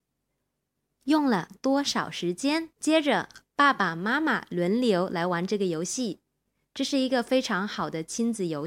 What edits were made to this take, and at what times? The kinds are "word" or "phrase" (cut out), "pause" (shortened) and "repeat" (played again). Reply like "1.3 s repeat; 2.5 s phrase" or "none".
2.7 s pause